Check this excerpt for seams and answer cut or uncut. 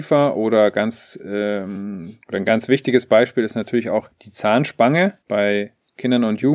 cut